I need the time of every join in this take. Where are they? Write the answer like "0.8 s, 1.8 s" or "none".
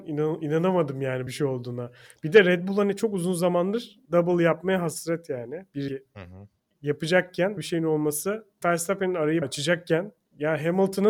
1.3 s, 4.0 s, 5.9 s, 7.6 s, 8.6 s, 9.4 s